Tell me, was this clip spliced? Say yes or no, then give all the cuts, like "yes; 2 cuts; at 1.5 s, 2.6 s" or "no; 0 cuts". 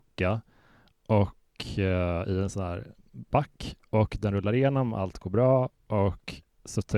no; 0 cuts